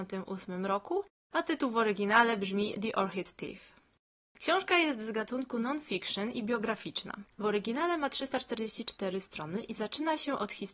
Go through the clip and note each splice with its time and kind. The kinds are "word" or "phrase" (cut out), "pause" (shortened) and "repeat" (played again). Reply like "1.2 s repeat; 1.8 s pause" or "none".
none